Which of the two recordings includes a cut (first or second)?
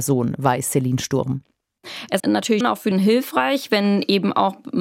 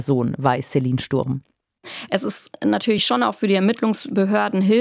first